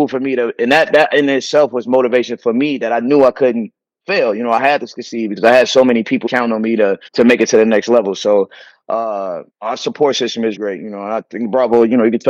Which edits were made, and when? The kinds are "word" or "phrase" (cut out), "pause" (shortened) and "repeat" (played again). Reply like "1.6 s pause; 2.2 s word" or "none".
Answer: 6.3 s phrase; 7.1 s pause; 9.5 s pause; 10.6 s word